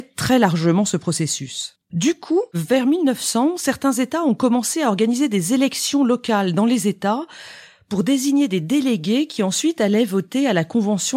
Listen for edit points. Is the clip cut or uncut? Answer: uncut